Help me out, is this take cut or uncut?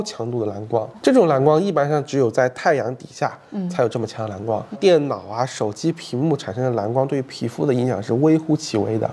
uncut